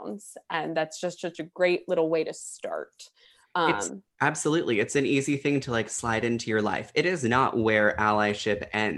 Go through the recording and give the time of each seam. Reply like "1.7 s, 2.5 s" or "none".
4.1 s